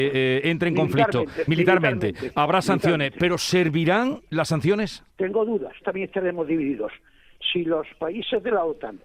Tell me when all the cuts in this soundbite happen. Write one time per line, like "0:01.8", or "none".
0:01.5
0:04.3
0:05.1
0:05.8